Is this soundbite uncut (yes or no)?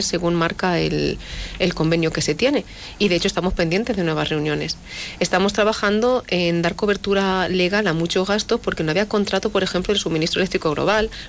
yes